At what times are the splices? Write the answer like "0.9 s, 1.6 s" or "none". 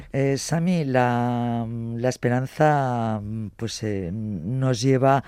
none